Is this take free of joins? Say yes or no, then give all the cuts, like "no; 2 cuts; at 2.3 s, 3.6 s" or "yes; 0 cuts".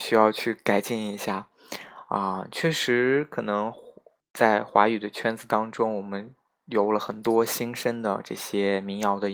yes; 0 cuts